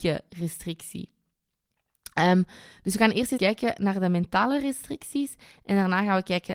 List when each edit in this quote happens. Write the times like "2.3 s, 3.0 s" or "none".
3.4 s